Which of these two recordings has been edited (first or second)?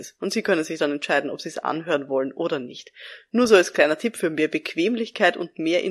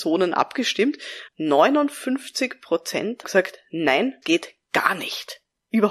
second